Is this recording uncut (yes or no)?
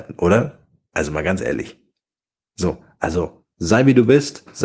yes